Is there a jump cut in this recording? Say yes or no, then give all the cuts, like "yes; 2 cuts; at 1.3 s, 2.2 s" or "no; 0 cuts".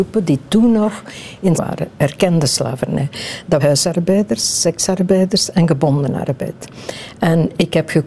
yes; 2 cuts; at 1.5 s, 3.6 s